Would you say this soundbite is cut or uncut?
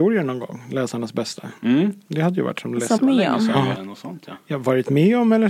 cut